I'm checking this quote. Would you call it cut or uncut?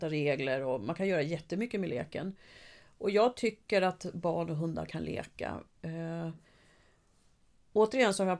uncut